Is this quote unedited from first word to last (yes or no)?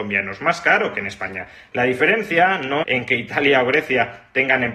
no